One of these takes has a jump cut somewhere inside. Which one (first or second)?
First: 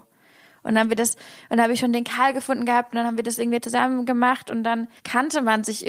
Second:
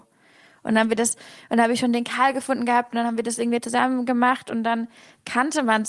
first